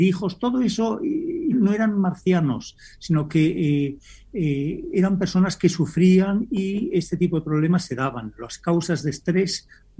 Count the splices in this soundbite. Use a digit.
1